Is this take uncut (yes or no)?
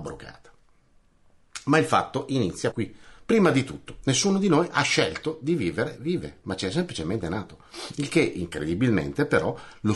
no